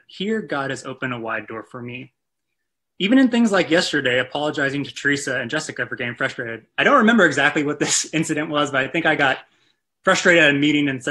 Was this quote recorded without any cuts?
yes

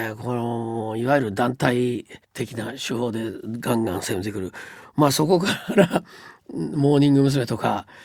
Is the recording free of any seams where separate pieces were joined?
no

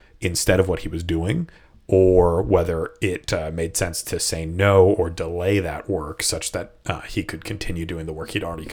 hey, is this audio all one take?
yes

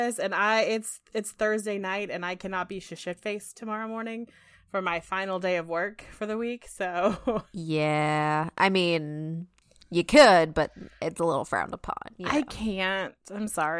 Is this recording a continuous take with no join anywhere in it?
yes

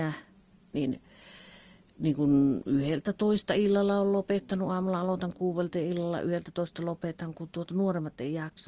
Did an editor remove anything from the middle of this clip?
no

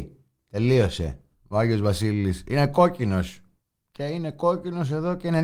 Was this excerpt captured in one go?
yes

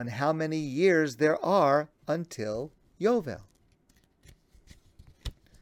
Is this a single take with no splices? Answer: yes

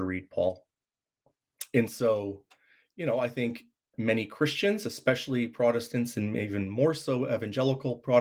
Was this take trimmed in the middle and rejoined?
yes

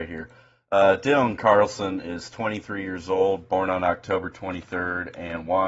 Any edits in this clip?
no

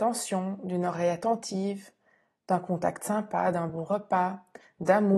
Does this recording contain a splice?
no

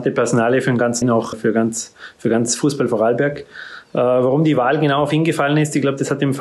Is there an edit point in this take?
yes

